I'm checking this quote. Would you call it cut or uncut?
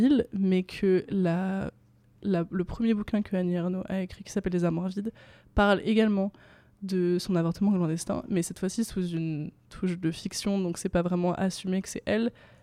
uncut